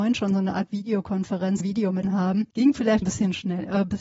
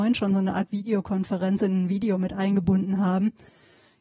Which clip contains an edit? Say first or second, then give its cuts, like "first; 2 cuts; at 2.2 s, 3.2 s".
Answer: first; 4 cuts; at 1.6 s, 2.0 s, 2.5 s, 3.0 s